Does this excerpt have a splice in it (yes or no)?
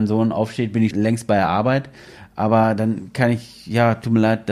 yes